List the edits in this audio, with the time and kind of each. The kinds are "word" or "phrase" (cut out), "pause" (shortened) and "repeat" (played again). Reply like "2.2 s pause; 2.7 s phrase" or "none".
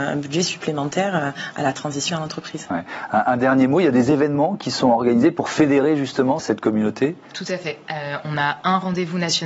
2.1 s word; 6.4 s word